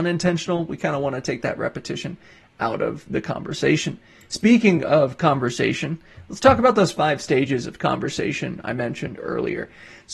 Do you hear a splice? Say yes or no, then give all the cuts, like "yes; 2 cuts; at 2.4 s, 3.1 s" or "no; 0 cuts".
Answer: no; 0 cuts